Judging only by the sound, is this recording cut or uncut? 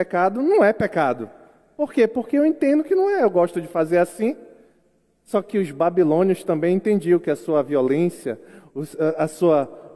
uncut